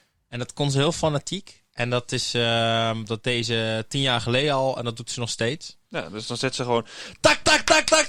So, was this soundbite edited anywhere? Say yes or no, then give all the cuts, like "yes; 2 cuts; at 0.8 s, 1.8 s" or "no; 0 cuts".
no; 0 cuts